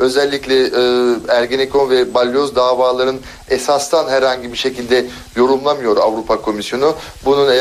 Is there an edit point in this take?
no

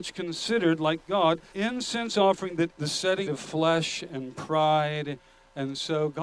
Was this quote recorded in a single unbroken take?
no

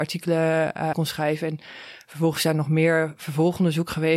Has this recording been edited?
yes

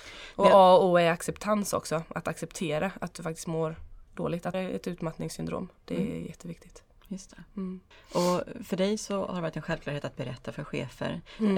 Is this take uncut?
no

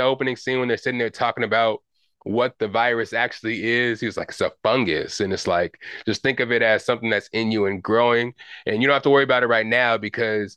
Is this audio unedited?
yes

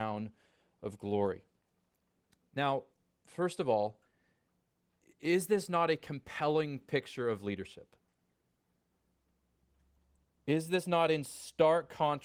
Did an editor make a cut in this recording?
no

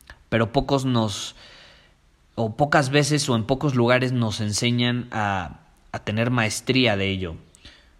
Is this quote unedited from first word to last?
yes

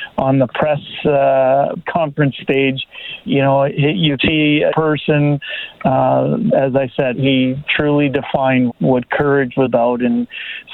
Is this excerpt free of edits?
no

